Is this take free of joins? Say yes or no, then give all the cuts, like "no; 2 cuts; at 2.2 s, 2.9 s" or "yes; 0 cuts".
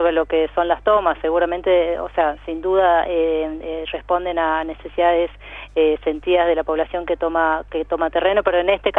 yes; 0 cuts